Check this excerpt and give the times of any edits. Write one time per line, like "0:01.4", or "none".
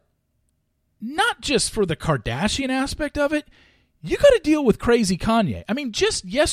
none